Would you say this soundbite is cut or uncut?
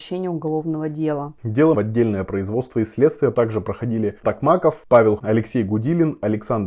cut